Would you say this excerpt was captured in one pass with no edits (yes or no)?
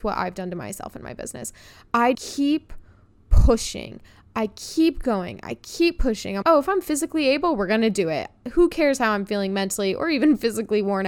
no